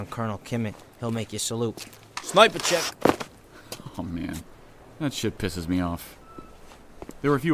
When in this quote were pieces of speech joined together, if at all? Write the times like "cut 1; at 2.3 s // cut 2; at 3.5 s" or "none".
cut 1; at 0.9 s